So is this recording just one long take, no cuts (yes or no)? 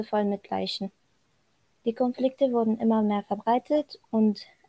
yes